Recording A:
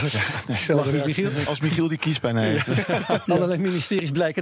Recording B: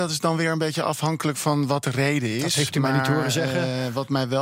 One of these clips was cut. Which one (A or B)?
A